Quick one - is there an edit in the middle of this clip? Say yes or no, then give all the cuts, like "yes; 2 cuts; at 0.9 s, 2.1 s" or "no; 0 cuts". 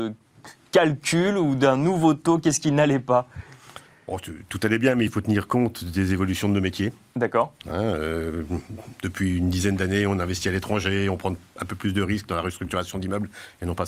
no; 0 cuts